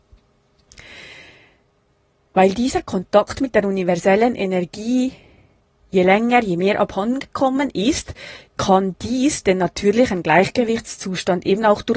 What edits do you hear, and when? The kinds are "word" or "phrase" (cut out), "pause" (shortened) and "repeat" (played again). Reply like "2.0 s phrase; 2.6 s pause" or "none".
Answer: none